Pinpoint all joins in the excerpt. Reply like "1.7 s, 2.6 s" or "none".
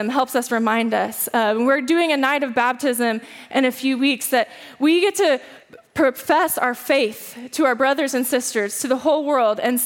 5.6 s

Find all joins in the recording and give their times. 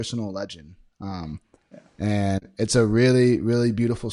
none

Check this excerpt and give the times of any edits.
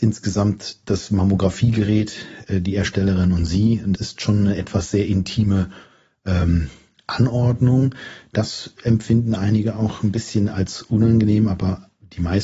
4.0 s

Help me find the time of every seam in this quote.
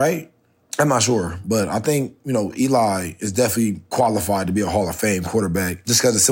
none

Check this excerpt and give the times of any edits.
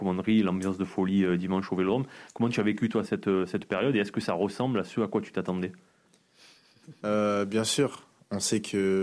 none

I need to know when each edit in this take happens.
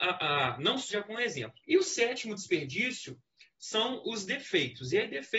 0.9 s, 1.6 s

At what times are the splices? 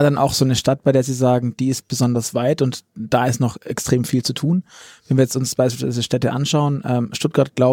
none

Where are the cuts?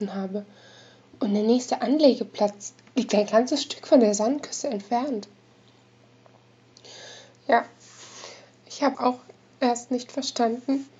8.9 s

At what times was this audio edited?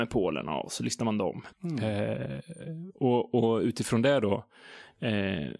1.5 s

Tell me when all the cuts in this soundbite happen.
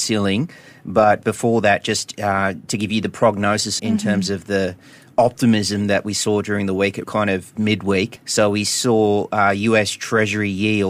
3.8 s, 7.0 s, 7.6 s

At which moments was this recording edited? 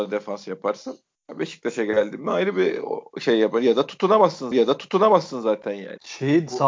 4.5 s

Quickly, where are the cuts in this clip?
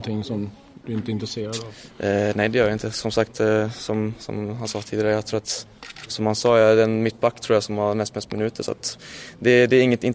none

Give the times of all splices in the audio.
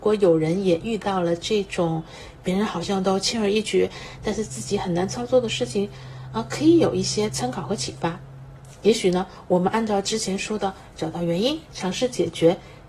10.9 s

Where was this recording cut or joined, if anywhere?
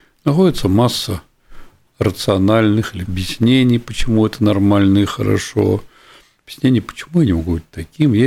3.1 s

